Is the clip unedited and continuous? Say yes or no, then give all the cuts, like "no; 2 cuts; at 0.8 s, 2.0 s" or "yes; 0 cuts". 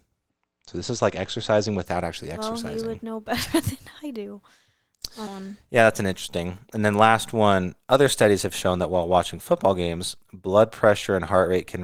no; 2 cuts; at 5.3 s, 10.2 s